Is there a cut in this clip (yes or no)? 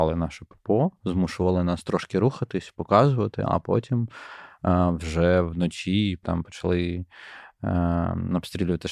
yes